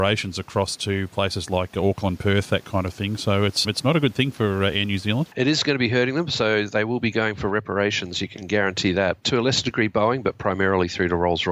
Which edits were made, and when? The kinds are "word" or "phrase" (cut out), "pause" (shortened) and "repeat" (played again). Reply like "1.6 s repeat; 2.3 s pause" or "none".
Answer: 3.6 s word